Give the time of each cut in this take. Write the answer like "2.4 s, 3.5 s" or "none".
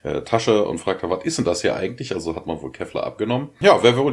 none